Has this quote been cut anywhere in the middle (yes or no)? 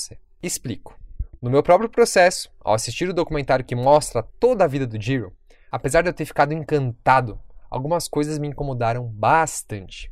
no